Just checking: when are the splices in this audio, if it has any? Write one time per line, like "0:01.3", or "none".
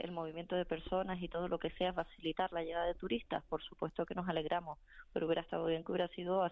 none